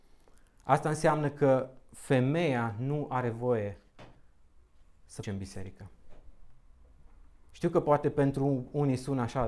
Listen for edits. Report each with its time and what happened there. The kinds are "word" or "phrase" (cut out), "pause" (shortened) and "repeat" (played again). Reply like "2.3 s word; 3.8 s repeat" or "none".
5.2 s word